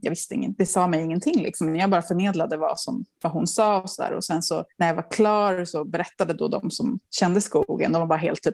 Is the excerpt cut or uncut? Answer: cut